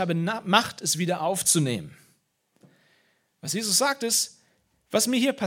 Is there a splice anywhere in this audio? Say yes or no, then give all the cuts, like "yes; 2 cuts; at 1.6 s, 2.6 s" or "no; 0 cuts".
no; 0 cuts